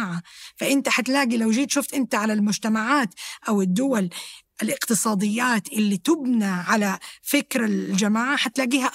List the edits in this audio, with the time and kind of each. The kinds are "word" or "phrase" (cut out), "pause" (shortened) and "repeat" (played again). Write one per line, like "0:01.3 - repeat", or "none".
none